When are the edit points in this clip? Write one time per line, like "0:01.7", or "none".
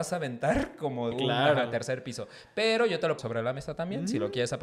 0:01.1
0:03.2